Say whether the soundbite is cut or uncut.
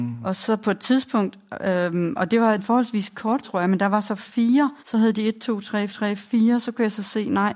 cut